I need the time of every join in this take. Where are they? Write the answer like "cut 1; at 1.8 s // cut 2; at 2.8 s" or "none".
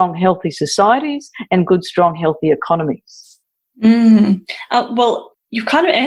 none